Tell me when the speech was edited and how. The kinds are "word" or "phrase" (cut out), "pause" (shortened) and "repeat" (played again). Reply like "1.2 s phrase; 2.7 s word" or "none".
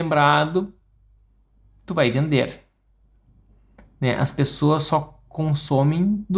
none

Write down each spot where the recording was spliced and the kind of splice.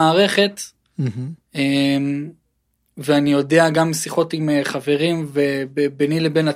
none

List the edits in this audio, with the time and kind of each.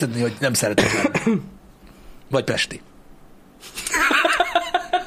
2.2 s pause

